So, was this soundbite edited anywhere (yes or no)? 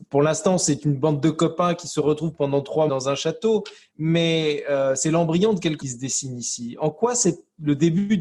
yes